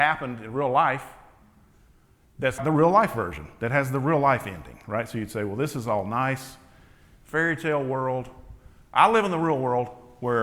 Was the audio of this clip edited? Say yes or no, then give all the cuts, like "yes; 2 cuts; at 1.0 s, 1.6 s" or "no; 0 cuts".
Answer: yes; 1 cut; at 2.6 s